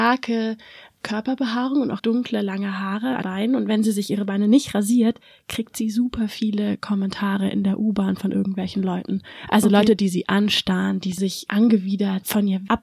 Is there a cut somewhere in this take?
yes; 2 cuts; at 2.0 s, 3.2 s

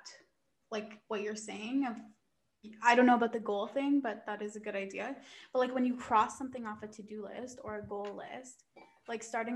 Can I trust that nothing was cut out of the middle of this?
yes; 0 cuts

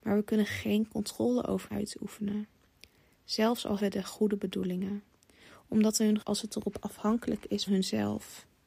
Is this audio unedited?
no; 5 cuts; at 1.7 s, 3.8 s, 6.2 s, 6.8 s, 7.7 s

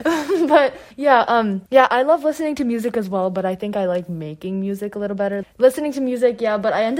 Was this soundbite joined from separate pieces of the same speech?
yes; 3 cuts; at 0.9 s, 1.7 s, 5.4 s

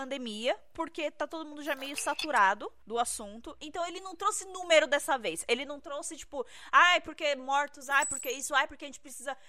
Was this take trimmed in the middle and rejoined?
no; 0 cuts

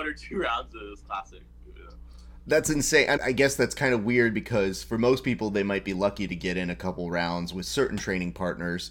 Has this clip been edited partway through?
yes; 1 cut; at 3.2 s

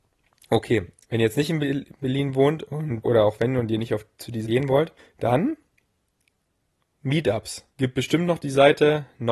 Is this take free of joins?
no; 4 cuts; at 3.0 s, 4.4 s, 5.0 s, 7.7 s

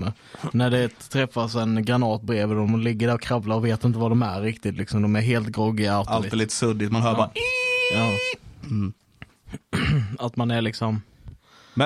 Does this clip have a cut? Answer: yes; 1 cut; at 9.3 s

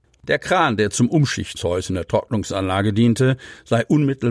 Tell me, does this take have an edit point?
yes; 1 cut; at 1.6 s

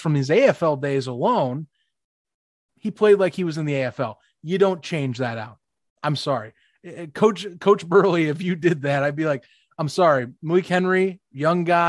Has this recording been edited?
no; 0 cuts

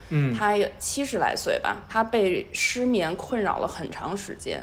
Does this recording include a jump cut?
yes; 1 cut; at 1.9 s

